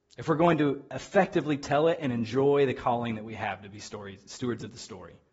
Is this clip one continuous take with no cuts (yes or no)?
yes